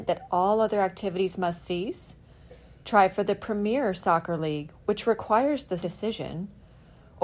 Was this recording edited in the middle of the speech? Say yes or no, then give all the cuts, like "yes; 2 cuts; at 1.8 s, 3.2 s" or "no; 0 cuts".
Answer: yes; 1 cut; at 5.8 s